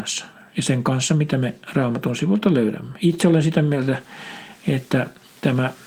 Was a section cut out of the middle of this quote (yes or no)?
no